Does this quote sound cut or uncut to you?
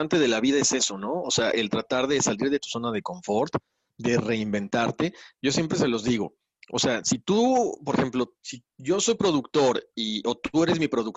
uncut